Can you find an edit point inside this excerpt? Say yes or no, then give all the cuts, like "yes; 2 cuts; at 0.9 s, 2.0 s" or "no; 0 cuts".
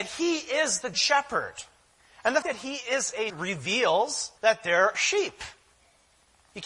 yes; 6 cuts; at 0.9 s, 2.0 s, 2.4 s, 3.3 s, 4.4 s, 4.9 s